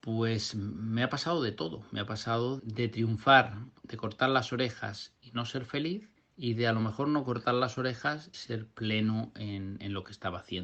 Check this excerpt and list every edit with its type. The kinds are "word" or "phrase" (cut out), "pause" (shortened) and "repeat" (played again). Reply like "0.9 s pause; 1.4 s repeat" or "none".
2.6 s word; 3.8 s pause; 6.2 s pause; 8.3 s word